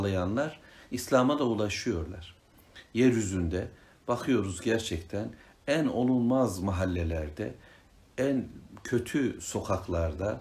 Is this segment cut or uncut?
uncut